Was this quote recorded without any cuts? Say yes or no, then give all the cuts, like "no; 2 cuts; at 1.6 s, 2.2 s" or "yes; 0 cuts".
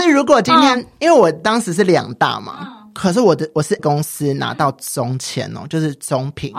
no; 1 cut; at 3.8 s